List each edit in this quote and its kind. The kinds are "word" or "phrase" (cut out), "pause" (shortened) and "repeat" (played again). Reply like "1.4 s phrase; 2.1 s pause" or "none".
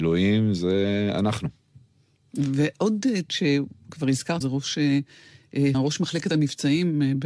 3.3 s word; 4.4 s word; 5.7 s word